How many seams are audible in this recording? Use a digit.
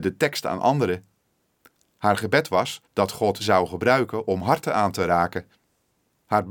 2